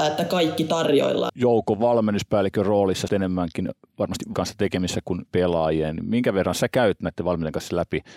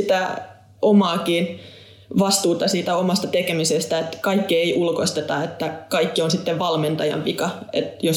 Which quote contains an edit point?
first; 4 cuts; at 1.3 s, 3.1 s, 4.3 s, 5.3 s

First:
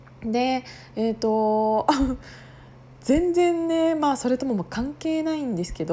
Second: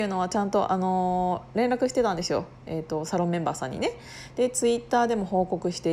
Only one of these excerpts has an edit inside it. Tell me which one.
second; 1 cut; at 2.6 s

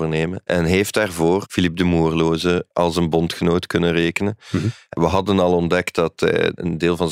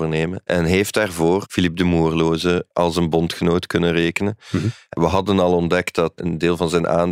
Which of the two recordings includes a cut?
second; 1 cut; at 6.2 s

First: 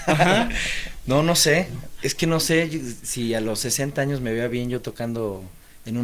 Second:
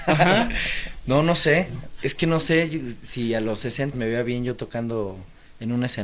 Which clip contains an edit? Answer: second; 1 cut; at 3.9 s

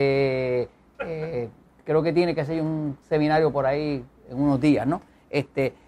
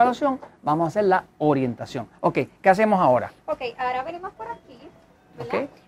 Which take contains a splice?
first; 1 cut; at 3.0 s

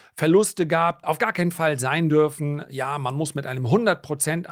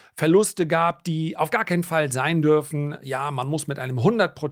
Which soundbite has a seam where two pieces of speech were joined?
first; 1 cut; at 1.0 s

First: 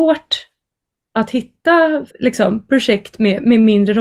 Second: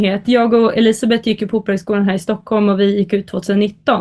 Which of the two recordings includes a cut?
first; 1 cut; at 2.1 s

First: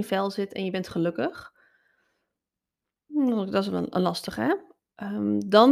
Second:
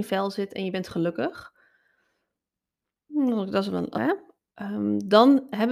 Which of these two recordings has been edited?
second; 1 cut; at 3.9 s

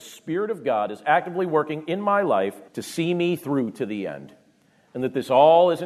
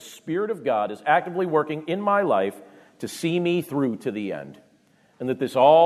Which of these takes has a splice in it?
first; 1 cut; at 2.7 s

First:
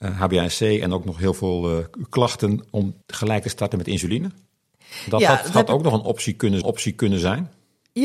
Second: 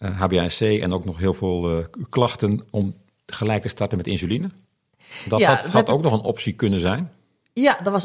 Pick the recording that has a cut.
first; 2 cuts; at 3.0 s, 6.6 s

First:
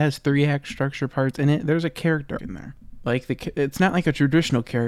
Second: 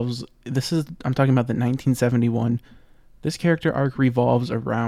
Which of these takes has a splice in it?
first; 1 cut; at 2.4 s

